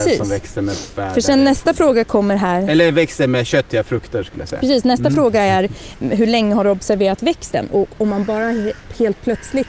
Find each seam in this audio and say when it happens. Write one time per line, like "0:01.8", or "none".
0:06.0